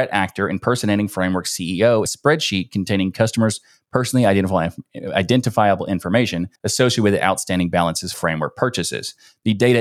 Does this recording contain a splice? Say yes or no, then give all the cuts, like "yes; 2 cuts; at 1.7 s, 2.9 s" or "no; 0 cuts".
yes; 3 cuts; at 2.0 s, 6.6 s, 8.1 s